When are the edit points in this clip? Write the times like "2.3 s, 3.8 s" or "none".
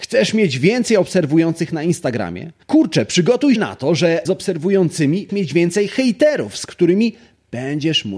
2.6 s, 3.6 s, 4.3 s, 5.3 s